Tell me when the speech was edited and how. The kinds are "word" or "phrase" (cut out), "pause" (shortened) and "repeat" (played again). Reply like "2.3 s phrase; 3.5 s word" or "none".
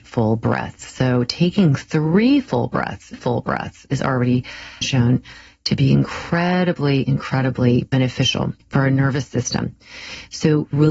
3.1 s repeat; 4.8 s phrase; 8.6 s pause